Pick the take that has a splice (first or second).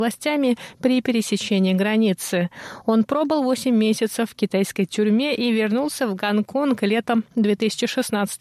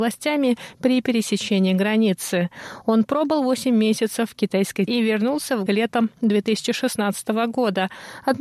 second